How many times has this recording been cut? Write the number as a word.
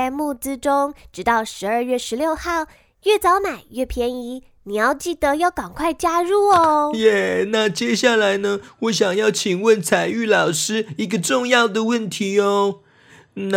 zero